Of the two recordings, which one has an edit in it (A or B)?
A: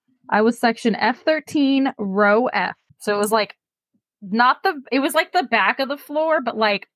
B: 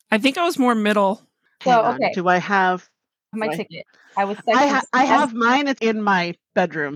B